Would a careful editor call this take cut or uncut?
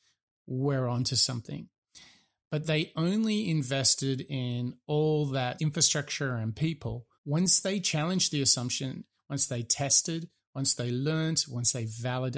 cut